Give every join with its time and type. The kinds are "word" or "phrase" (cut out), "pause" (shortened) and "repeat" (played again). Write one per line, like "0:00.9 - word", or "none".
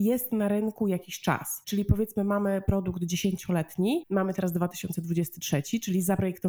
none